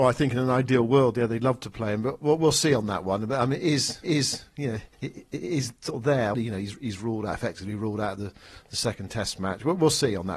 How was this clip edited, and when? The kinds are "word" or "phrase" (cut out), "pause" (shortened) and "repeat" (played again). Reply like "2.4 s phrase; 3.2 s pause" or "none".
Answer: 4.0 s repeat; 4.9 s pause; 6.3 s phrase